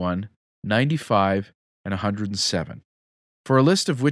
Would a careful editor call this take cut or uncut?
uncut